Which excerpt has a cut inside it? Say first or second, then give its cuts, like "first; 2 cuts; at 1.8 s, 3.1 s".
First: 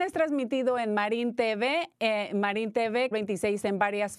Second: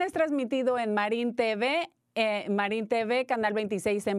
first; 2 cuts; at 1.9 s, 3.1 s